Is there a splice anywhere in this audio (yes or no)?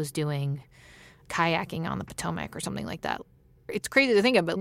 no